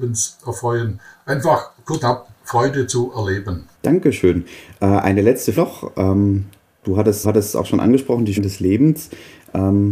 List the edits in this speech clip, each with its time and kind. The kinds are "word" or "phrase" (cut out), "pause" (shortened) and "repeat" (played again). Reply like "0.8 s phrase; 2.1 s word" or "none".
1.1 s pause; 2.0 s word; 2.4 s pause; 3.7 s pause; 5.6 s word; 7.2 s repeat; 8.4 s word